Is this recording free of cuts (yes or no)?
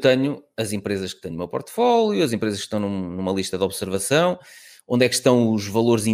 yes